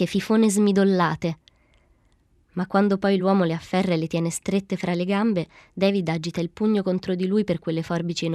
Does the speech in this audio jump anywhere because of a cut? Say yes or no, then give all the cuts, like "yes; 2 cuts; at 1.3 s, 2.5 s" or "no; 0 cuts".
no; 0 cuts